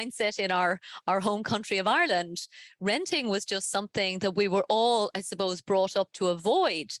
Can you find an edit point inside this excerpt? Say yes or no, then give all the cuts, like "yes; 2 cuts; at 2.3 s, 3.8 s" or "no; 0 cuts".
no; 0 cuts